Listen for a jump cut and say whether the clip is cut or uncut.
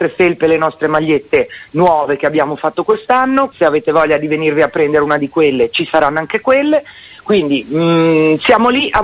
cut